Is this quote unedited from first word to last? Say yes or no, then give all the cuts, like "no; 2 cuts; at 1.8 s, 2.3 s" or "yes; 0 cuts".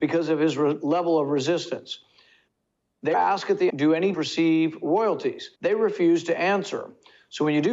no; 4 cuts; at 3.1 s, 3.7 s, 4.1 s, 5.6 s